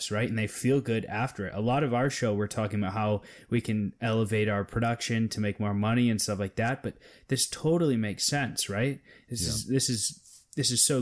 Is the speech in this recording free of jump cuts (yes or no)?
yes